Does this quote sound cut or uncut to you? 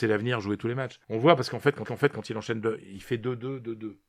cut